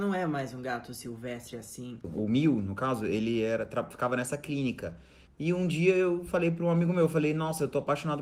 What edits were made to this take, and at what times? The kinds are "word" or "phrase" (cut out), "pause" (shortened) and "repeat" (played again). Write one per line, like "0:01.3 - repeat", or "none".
0:05.3 - pause